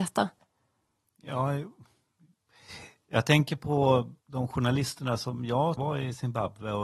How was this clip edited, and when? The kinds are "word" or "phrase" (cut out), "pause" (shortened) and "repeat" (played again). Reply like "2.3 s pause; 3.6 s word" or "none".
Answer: 4.2 s pause; 5.8 s phrase

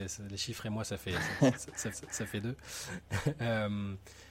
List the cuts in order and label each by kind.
1.9 s repeat

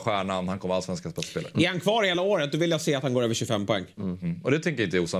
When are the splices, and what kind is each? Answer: none

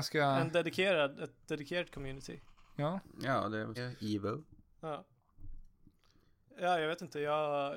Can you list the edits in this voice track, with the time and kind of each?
3.8 s phrase

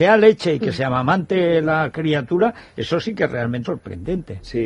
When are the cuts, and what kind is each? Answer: 3.6 s word

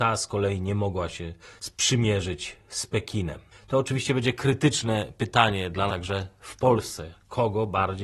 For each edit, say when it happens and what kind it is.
1.4 s pause; 3.5 s pause; 5.9 s word

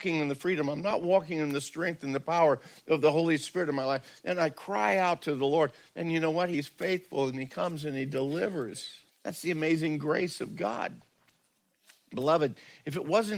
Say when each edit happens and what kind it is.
9.1 s pause

